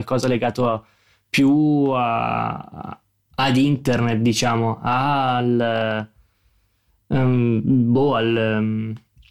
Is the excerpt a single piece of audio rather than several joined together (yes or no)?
yes